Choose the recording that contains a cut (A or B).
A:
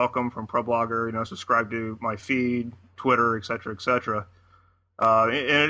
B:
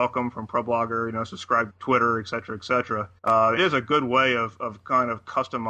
B